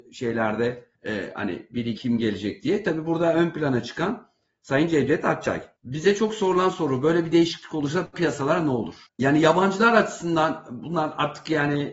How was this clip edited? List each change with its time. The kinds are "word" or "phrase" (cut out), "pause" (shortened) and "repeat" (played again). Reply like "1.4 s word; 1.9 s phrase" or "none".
0.9 s pause; 2.0 s word